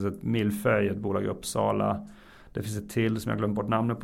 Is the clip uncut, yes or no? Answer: yes